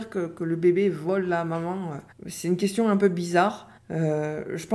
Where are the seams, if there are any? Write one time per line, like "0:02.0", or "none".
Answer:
0:02.1
0:03.8